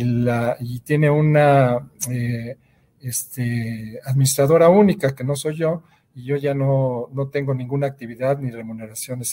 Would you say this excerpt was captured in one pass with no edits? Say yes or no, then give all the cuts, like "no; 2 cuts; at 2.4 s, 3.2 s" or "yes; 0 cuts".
yes; 0 cuts